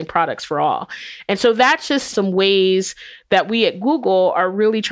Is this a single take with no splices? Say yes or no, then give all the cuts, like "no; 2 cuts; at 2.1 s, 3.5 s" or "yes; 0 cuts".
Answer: yes; 0 cuts